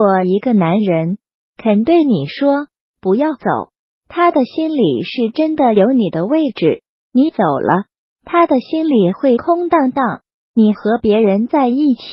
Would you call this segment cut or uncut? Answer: uncut